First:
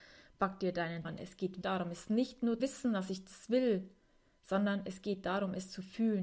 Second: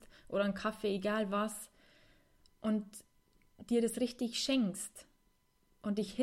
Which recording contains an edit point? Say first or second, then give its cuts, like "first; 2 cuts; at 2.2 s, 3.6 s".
first; 3 cuts; at 1.0 s, 1.6 s, 2.6 s